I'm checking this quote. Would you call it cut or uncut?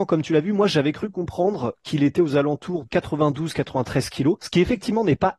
cut